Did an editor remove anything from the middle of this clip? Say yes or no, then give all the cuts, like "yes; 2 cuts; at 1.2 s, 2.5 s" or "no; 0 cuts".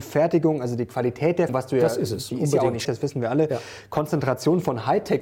yes; 2 cuts; at 1.5 s, 2.8 s